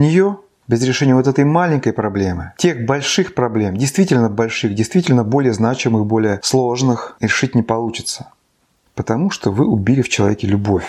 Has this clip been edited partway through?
no; 0 cuts

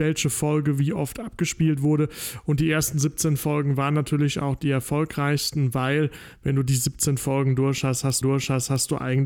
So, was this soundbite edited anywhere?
yes; 1 cut; at 8.2 s

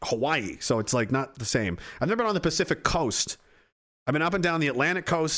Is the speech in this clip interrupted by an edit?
no; 0 cuts

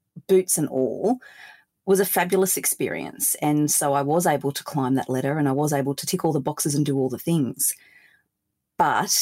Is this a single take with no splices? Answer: yes; 0 cuts

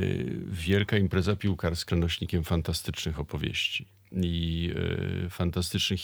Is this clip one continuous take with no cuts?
no; 1 cut; at 1.9 s

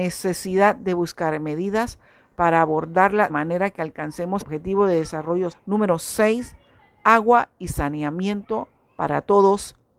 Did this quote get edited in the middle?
yes; 3 cuts; at 3.3 s, 4.4 s, 5.5 s

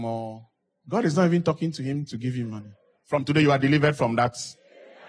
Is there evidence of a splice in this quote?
no; 0 cuts

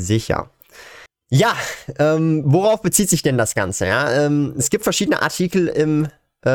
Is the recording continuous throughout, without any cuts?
no; 1 cut; at 1.1 s

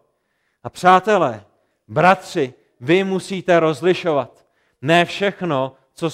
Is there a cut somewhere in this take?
no; 0 cuts

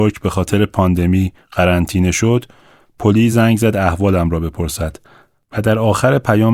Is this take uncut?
yes; 0 cuts

